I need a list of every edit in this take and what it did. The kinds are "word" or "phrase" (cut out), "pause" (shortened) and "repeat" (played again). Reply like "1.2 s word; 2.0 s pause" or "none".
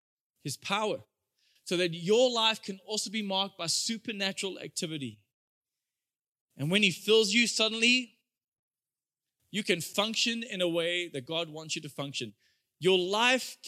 none